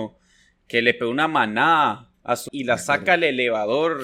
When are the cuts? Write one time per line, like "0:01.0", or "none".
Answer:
0:02.1
0:02.5